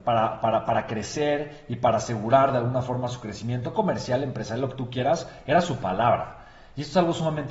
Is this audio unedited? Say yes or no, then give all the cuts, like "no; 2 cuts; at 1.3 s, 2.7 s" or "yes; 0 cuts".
yes; 0 cuts